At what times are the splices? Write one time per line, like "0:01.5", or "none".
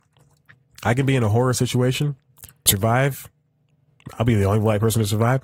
0:02.7